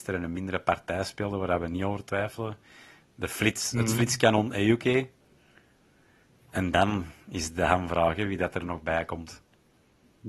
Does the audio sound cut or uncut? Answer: uncut